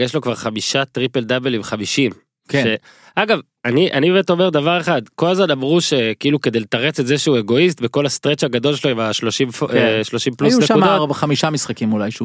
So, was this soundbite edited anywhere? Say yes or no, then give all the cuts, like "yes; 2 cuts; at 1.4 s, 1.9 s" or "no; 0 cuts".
no; 0 cuts